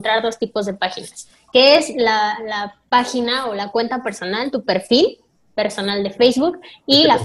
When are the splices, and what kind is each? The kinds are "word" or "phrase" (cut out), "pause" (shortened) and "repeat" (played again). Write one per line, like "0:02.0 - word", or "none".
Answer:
none